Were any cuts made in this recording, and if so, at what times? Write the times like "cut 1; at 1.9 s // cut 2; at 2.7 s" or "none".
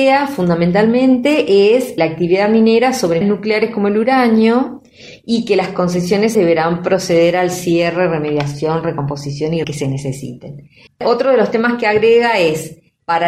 cut 1; at 2.0 s // cut 2; at 3.2 s // cut 3; at 6.3 s // cut 4; at 9.6 s // cut 5; at 10.9 s